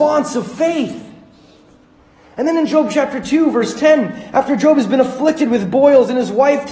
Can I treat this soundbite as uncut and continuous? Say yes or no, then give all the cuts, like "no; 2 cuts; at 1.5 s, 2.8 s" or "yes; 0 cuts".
yes; 0 cuts